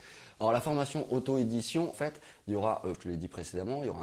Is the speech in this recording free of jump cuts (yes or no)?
no